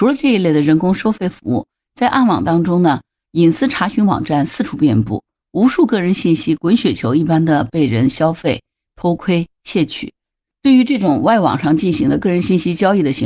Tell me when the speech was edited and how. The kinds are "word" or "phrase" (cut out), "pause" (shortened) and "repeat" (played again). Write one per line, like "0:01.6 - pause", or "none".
none